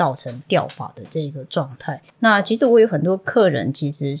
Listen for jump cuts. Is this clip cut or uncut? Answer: cut